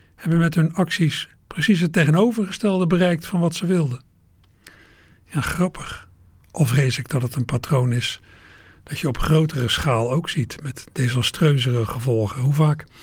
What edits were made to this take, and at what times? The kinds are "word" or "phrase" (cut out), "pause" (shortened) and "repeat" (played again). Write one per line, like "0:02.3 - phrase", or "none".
none